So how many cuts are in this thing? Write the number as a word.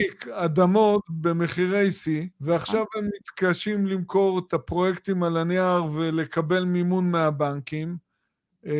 one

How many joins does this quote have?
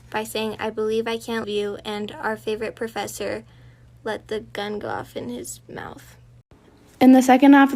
one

